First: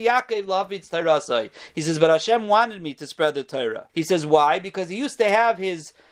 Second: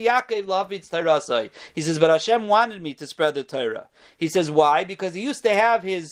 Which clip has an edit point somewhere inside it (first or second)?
first